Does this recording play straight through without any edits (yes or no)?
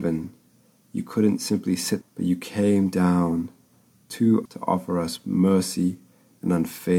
no